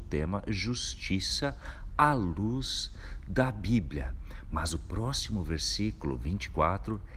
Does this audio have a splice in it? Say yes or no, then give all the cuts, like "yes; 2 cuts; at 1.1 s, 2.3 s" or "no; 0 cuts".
no; 0 cuts